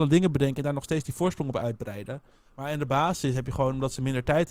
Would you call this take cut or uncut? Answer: uncut